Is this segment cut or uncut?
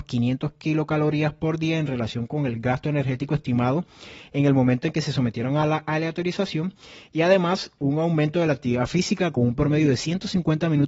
uncut